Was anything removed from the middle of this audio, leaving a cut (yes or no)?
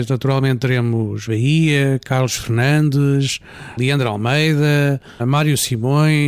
yes